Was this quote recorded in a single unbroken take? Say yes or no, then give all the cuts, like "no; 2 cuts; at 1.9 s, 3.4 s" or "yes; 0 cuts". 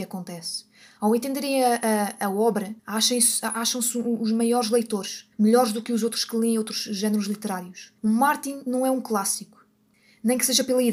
no; 3 cuts; at 2.8 s, 5.3 s, 8.0 s